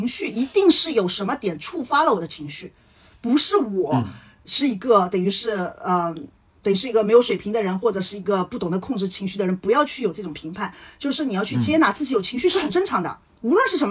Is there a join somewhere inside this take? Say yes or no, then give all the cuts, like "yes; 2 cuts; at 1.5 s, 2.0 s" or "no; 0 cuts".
no; 0 cuts